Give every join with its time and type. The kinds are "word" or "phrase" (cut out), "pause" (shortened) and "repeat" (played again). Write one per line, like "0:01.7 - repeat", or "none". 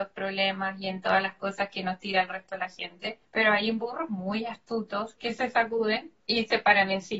0:03.3 - pause
0:06.2 - pause

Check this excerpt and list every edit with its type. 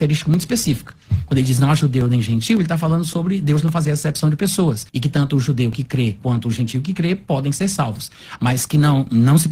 0:04.9 - pause

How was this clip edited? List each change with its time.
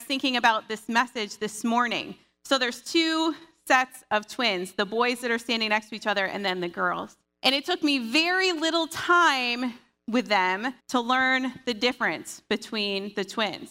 0:07.2 - pause
0:10.8 - pause

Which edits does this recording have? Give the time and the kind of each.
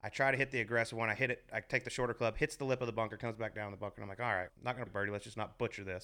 0:04.5 - word
0:04.9 - word

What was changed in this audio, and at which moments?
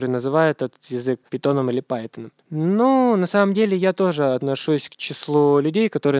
0:01.3 - pause
0:02.4 - pause

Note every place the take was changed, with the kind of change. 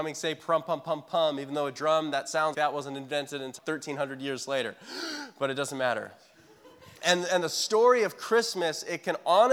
0:02.5 - word
0:03.6 - word
0:07.0 - pause

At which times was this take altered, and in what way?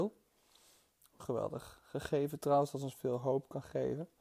none

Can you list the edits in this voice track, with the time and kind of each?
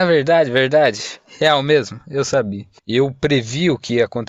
0:02.8 - pause

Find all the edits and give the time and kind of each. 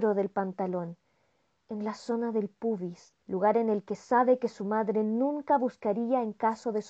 0:03.2 - pause

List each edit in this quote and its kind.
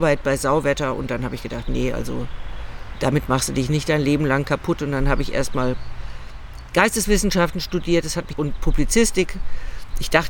0:08.3 - word

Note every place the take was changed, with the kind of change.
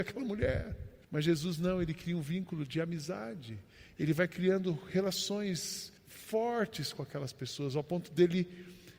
0:01.0 - pause
0:06.0 - pause

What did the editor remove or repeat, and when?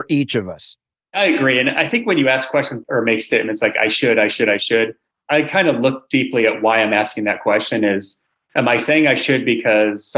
none

